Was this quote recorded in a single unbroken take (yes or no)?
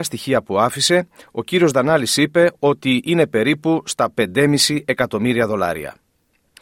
yes